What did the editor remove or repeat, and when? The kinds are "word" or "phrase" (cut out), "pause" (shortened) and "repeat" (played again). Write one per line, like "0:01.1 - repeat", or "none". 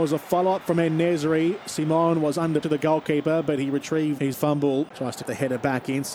0:02.6 - word
0:04.3 - word
0:05.2 - word